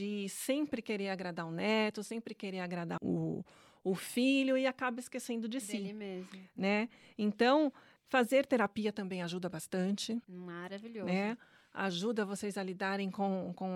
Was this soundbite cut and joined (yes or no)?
yes